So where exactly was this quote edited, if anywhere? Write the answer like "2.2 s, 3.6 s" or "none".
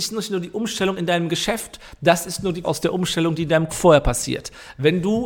2.6 s, 3.7 s